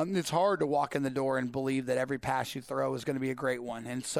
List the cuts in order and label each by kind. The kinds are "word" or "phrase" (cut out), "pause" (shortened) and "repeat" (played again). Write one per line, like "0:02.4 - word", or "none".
none